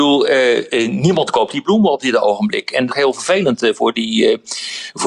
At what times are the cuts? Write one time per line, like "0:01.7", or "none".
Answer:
0:02.9